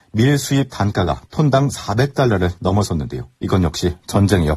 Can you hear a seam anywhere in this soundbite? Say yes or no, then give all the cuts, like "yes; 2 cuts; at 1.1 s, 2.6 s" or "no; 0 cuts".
yes; 1 cut; at 3.4 s